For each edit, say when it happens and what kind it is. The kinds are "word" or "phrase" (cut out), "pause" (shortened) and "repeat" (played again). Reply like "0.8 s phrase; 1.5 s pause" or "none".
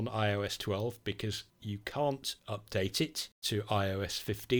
2.4 s pause; 3.3 s pause